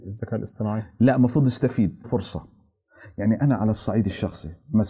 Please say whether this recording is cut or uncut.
cut